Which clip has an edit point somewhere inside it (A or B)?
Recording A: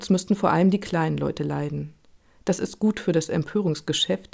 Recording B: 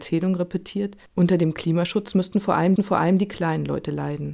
B